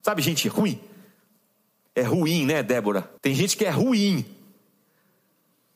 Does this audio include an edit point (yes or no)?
yes